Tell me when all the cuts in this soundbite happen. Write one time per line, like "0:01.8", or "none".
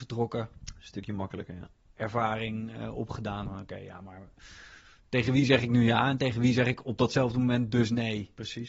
none